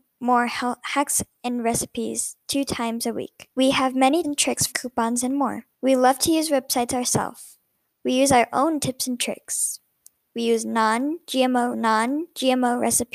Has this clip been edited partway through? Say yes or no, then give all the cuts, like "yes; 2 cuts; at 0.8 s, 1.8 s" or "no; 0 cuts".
yes; 5 cuts; at 3.5 s, 4.2 s, 4.7 s, 5.7 s, 11.7 s